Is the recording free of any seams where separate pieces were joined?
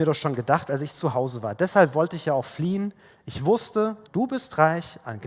no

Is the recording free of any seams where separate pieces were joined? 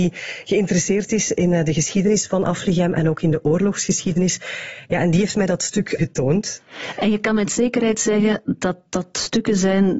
no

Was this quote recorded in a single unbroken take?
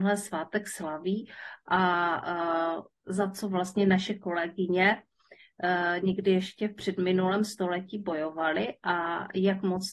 yes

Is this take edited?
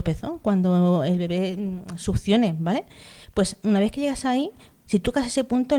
no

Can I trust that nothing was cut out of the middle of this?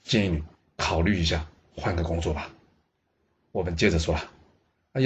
yes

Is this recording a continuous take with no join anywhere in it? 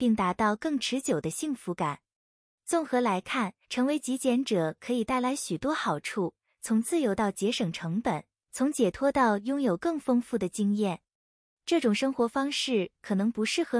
no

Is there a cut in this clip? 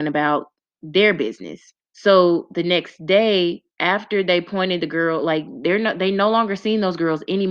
yes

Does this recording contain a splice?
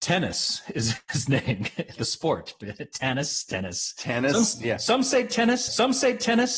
yes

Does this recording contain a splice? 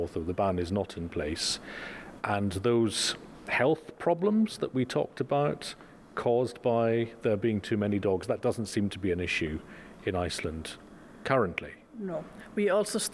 no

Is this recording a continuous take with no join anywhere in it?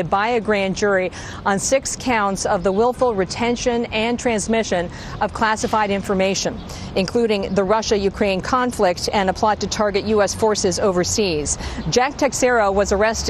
yes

